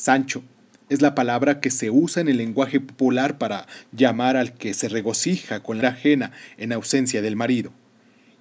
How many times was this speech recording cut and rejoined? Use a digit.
1